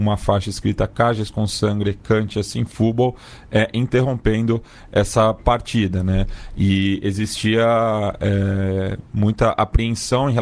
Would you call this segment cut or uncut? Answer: uncut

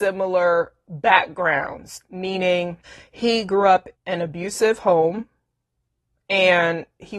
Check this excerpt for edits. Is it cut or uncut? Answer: cut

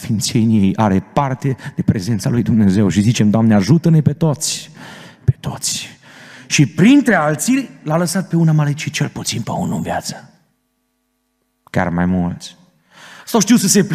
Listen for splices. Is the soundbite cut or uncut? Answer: uncut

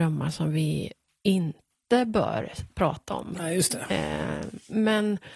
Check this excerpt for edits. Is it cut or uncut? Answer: uncut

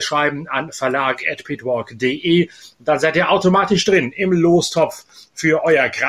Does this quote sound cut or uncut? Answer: uncut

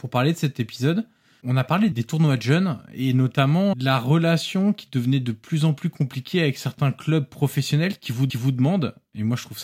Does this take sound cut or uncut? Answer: cut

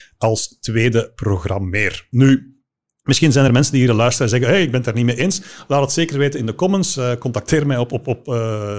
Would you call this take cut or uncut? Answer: uncut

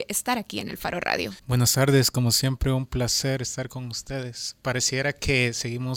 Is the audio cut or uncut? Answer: cut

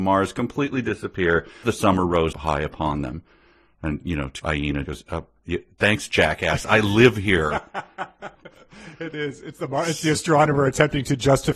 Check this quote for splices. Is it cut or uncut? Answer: cut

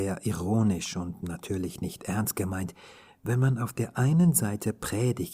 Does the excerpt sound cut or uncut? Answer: uncut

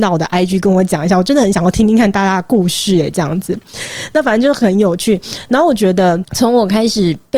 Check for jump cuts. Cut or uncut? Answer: uncut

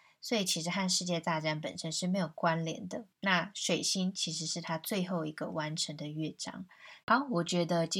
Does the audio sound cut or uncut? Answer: cut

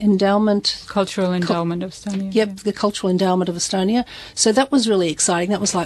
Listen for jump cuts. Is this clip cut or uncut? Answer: uncut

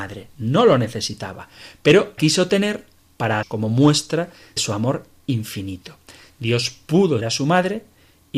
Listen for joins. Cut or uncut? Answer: cut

